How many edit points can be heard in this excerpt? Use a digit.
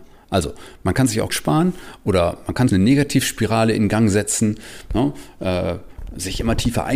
2